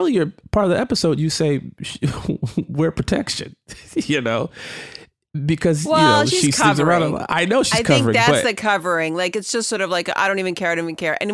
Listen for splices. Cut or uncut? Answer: uncut